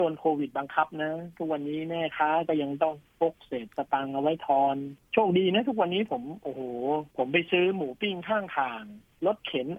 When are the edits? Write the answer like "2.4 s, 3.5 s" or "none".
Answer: 7.1 s